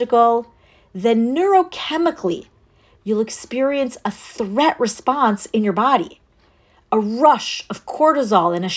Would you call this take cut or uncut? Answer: uncut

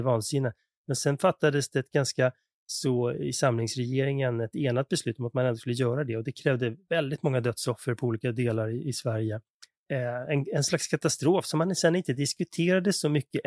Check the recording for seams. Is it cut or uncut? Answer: uncut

